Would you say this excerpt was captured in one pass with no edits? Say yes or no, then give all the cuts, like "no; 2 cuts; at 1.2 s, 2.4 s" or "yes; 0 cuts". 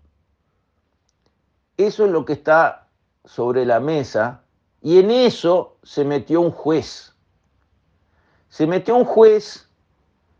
yes; 0 cuts